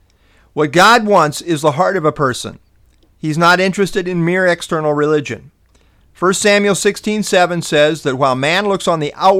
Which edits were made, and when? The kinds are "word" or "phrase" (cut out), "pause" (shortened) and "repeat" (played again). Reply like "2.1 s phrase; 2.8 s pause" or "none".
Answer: none